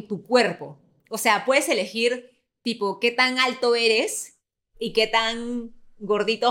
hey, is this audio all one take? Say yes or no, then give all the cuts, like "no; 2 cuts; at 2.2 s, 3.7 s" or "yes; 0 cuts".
yes; 0 cuts